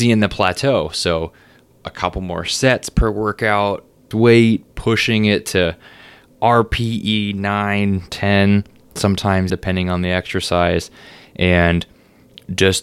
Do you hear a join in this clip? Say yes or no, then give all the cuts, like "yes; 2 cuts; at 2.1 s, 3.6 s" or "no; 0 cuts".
yes; 2 cuts; at 4.1 s, 9.5 s